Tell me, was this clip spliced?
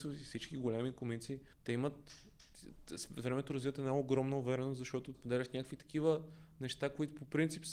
yes; 2 cuts; at 1.5 s, 5.1 s

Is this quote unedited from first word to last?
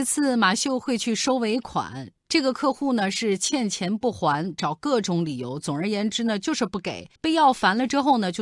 no; 1 cut; at 7.2 s

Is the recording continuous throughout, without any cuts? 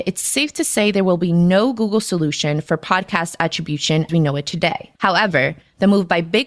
no; 2 cuts; at 4.1 s, 4.9 s

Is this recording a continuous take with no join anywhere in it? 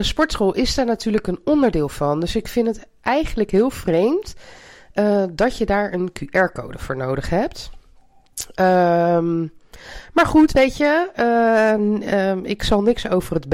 yes; 0 cuts

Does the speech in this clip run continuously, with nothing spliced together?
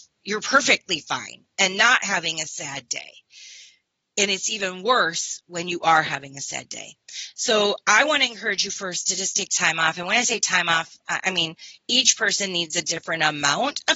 yes; 0 cuts

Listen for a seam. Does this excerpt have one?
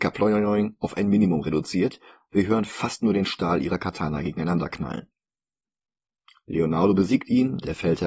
no; 0 cuts

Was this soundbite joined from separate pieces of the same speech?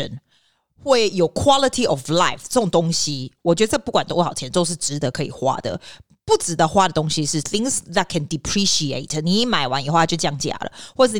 no; 0 cuts

